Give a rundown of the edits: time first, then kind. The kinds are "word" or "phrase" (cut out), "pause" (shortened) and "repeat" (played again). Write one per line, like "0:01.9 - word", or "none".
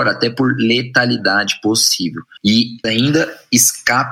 0:02.8 - word